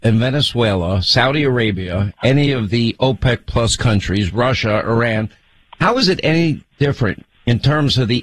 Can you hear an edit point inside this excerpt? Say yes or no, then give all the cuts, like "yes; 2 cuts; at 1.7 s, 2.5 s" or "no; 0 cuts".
no; 0 cuts